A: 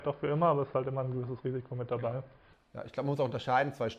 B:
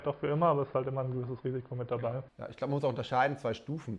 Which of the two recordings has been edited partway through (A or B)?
B